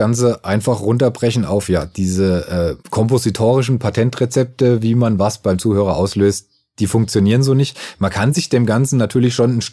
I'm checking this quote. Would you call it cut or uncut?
cut